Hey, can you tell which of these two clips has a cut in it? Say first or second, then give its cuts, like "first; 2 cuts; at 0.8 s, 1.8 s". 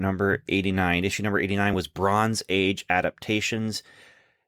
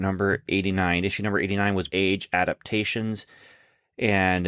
second; 1 cut; at 1.9 s